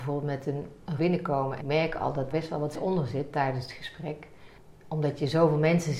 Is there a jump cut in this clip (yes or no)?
yes